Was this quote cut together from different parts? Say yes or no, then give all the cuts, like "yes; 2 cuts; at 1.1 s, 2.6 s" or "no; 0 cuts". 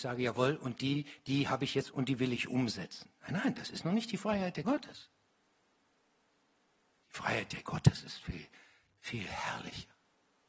yes; 4 cuts; at 1.9 s, 3.1 s, 4.6 s, 7.6 s